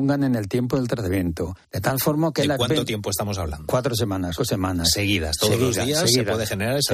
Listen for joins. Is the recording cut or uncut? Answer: cut